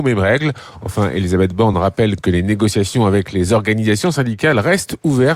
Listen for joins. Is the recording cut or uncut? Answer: uncut